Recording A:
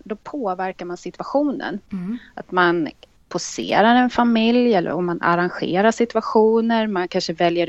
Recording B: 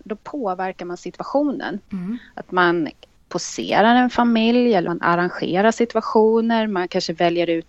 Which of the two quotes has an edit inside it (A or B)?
B